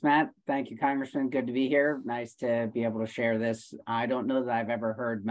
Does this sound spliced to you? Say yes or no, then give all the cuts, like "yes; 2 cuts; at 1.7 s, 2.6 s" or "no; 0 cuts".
no; 0 cuts